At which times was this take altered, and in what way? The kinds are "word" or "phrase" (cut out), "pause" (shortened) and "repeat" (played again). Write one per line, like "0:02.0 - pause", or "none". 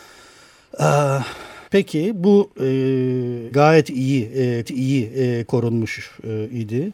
0:01.7 - pause
0:03.5 - word
0:04.6 - repeat